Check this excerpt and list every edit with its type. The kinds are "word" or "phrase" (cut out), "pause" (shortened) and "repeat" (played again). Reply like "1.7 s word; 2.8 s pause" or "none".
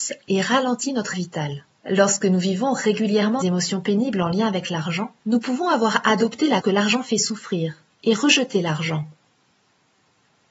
1.1 s word; 1.7 s pause; 3.4 s word; 5.2 s pause; 6.6 s word; 7.9 s pause